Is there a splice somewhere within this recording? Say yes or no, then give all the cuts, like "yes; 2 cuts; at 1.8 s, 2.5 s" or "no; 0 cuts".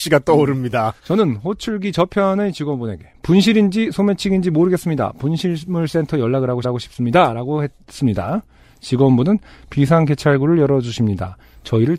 yes; 2 cuts; at 1.0 s, 6.6 s